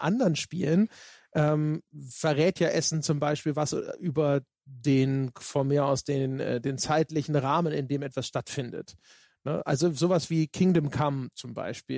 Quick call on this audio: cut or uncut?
uncut